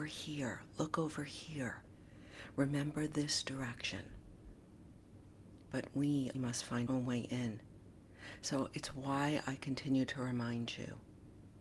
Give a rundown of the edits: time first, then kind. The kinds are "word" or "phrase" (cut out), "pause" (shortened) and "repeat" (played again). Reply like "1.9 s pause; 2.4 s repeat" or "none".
6.3 s word; 6.9 s phrase